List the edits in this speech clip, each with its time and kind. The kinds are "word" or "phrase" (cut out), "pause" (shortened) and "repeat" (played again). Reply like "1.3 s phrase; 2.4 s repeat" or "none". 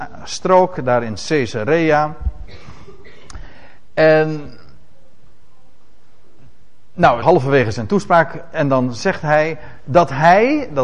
7.2 s word